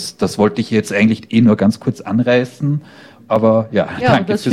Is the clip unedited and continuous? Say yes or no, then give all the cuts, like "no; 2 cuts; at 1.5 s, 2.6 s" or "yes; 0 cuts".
yes; 0 cuts